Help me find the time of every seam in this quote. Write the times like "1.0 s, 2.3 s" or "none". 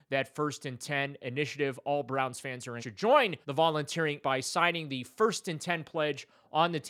2.8 s, 3.4 s, 4.2 s

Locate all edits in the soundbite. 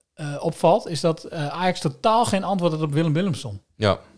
none

